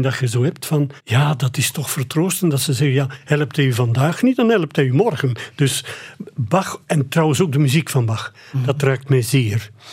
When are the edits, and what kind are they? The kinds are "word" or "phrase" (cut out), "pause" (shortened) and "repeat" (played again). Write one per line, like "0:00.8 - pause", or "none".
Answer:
0:01.0 - pause